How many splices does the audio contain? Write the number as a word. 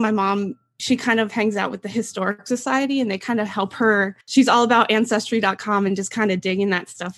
one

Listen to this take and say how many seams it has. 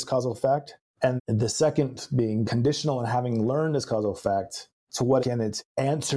three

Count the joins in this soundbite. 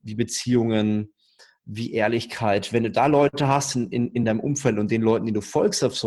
zero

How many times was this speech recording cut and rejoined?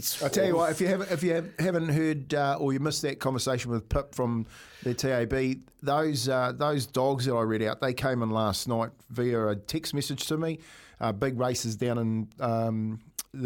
zero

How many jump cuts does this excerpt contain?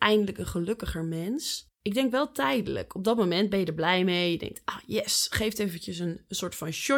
one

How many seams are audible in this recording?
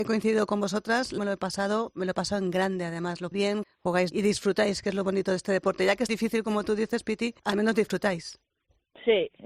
six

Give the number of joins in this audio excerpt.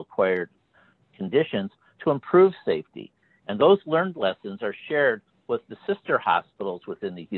zero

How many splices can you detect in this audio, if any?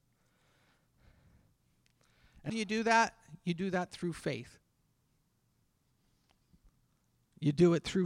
one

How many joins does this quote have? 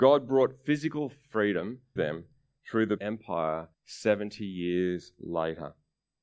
three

